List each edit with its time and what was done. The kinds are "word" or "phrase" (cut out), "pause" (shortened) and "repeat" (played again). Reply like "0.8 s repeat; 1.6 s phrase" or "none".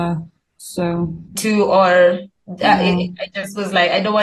1.3 s phrase; 2.4 s pause